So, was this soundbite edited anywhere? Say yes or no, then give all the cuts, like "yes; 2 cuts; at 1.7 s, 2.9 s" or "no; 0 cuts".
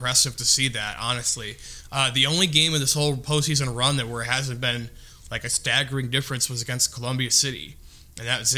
no; 0 cuts